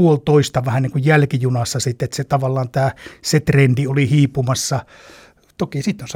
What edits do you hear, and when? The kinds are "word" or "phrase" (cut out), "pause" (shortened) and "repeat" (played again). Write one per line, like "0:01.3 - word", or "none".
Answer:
none